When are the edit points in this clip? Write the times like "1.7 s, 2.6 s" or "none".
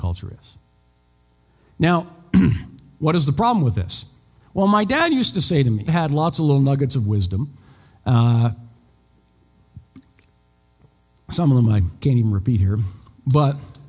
5.9 s, 12.0 s

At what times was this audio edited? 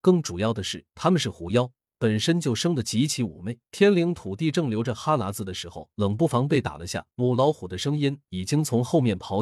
0.9 s, 3.7 s, 5.9 s, 7.1 s

